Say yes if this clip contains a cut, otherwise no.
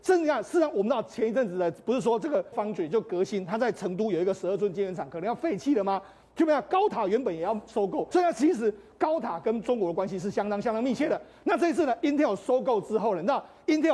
yes